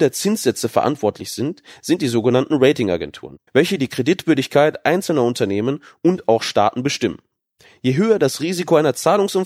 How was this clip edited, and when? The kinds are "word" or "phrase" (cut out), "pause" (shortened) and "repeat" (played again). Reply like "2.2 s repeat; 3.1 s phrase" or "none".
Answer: 3.5 s pause